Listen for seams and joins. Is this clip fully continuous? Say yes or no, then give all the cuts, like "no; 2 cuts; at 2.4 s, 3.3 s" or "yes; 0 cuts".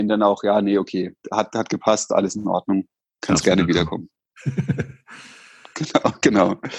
yes; 0 cuts